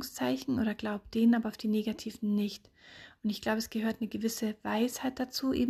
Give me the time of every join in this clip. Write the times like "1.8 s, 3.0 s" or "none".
none